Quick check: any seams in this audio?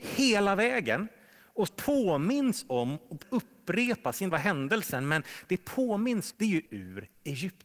yes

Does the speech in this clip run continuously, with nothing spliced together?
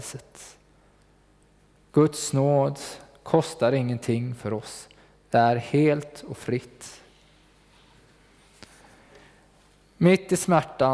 yes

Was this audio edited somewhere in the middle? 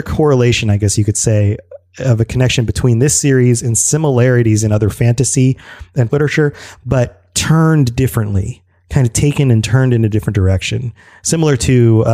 yes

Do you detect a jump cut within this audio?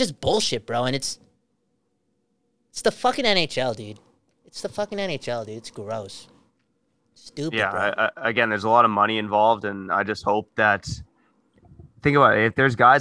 no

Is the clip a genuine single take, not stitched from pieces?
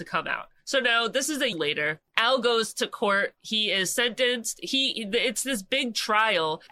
no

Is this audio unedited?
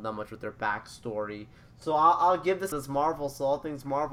no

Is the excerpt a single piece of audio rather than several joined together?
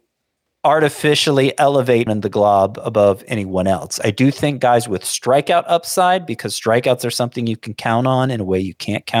no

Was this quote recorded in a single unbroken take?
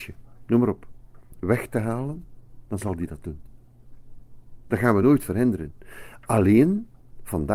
yes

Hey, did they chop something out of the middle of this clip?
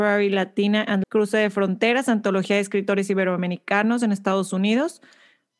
yes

